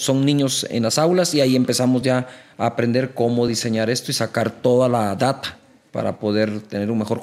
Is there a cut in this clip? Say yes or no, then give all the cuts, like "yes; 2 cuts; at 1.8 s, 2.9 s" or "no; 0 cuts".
no; 0 cuts